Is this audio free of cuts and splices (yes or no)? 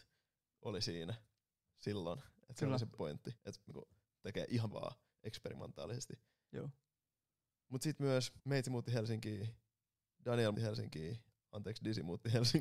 no